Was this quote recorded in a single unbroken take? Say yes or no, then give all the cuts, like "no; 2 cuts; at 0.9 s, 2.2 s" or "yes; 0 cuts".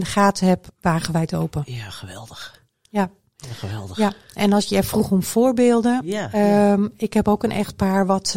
yes; 0 cuts